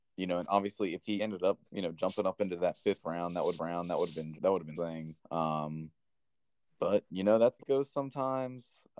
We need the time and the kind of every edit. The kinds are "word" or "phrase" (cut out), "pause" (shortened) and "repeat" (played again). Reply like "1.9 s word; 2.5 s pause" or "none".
1.2 s phrase; 1.6 s pause; 3.6 s repeat; 4.3 s word; 4.7 s phrase; 5.2 s pause; 7.6 s word